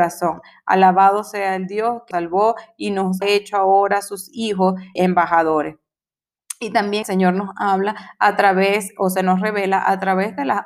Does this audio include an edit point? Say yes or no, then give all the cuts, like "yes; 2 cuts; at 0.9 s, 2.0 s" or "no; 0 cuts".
yes; 4 cuts; at 2.1 s, 3.2 s, 5.0 s, 7.0 s